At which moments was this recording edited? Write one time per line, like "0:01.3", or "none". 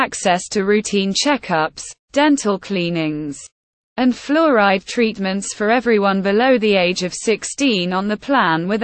none